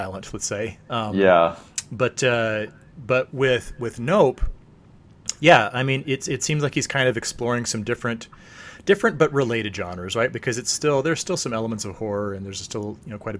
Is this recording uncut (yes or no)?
yes